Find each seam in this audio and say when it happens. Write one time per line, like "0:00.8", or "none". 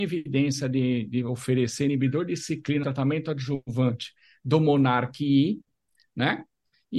0:02.8